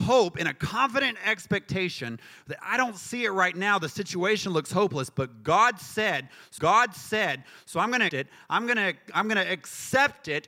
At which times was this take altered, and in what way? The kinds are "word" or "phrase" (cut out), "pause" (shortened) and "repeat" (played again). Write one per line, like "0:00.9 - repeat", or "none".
0:06.6 - repeat
0:08.1 - word

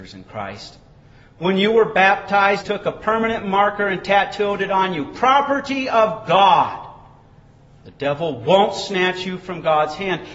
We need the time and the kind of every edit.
0:02.6 - phrase

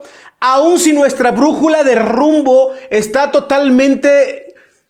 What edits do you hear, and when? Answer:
none

